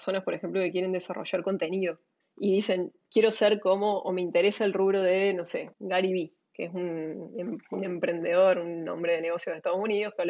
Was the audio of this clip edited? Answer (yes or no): yes